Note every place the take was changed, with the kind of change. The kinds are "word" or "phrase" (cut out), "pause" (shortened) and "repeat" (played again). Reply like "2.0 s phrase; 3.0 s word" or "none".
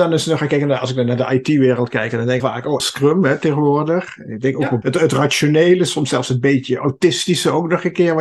2.4 s phrase; 2.8 s word; 4.8 s word